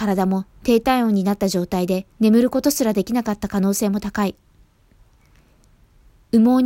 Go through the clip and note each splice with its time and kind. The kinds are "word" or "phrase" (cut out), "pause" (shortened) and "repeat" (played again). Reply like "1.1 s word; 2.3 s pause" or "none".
2.1 s pause